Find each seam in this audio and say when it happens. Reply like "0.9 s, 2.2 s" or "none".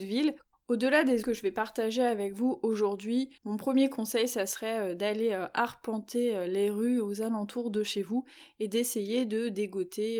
1.2 s, 3.4 s